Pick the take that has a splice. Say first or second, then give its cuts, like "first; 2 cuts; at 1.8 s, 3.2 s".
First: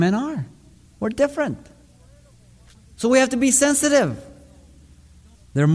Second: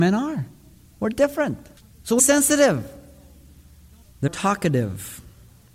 second; 3 cuts; at 1.8 s, 2.2 s, 4.3 s